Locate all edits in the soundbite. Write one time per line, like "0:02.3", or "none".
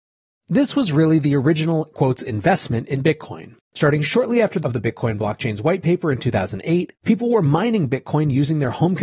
0:01.9
0:03.6
0:04.6
0:07.0